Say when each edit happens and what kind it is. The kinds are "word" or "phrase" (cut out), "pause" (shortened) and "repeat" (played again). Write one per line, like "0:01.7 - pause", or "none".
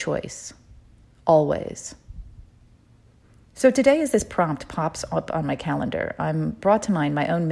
none